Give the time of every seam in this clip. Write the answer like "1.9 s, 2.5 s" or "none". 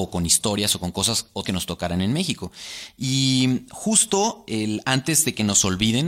1.4 s